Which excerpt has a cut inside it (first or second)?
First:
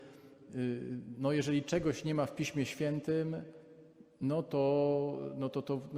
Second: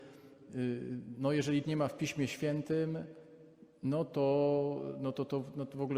second